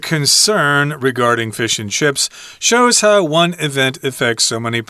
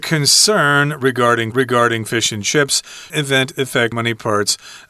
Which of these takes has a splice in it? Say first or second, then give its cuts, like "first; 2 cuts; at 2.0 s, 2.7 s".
second; 3 cuts; at 1.5 s, 3.1 s, 3.9 s